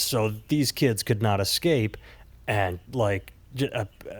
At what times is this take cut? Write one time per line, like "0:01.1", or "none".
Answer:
0:02.9

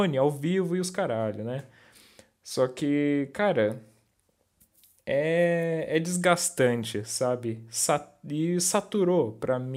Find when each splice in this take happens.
none

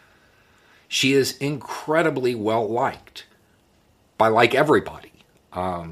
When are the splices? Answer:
none

